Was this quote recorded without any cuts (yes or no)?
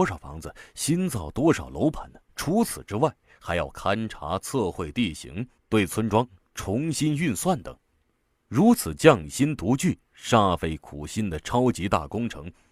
no